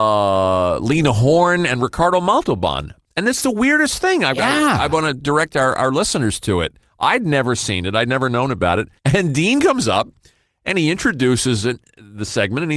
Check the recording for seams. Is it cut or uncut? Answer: cut